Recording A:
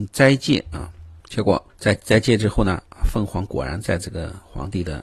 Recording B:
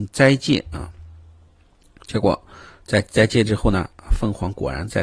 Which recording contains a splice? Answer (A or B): A